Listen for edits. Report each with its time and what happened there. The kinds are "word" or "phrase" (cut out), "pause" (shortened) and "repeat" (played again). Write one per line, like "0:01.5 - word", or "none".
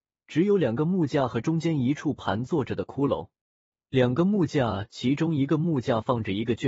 none